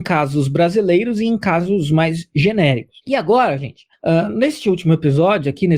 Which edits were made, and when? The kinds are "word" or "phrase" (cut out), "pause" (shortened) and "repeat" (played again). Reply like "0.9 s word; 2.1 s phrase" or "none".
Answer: 3.0 s pause; 3.9 s pause

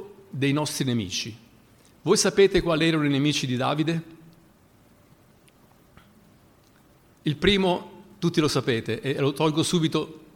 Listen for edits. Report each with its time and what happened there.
none

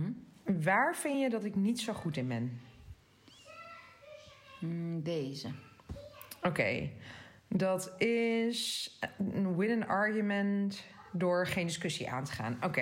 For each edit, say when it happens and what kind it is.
none

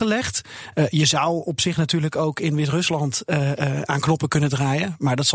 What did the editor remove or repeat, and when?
none

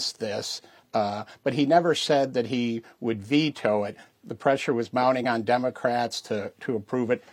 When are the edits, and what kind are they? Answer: none

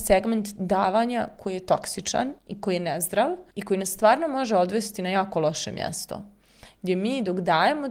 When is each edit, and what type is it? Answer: 2.4 s pause; 3.5 s pause

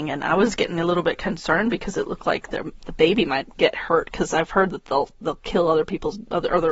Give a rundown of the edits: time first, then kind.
none

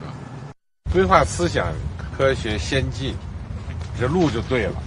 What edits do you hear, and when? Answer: 3.9 s word

